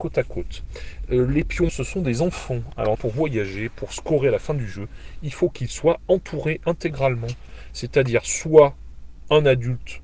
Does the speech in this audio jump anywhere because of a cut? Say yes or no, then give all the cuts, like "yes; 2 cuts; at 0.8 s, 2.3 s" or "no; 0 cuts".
yes; 2 cuts; at 1.7 s, 2.9 s